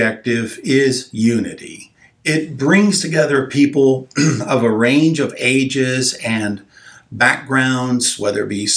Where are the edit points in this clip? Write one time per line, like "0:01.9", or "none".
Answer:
none